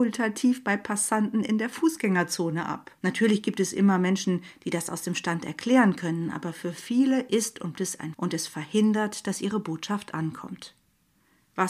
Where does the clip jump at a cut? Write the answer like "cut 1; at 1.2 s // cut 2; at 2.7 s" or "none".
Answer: cut 1; at 3.0 s // cut 2; at 7.8 s // cut 3; at 8.1 s